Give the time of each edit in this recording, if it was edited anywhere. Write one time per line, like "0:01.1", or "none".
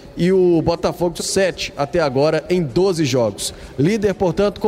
0:01.2